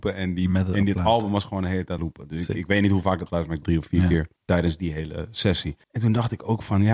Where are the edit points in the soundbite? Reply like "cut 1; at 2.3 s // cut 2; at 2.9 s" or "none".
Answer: cut 1; at 2.0 s // cut 2; at 3.3 s // cut 3; at 3.6 s // cut 4; at 4.4 s // cut 5; at 5.8 s